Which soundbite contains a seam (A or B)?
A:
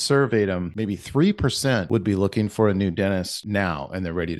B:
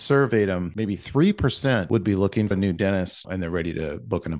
B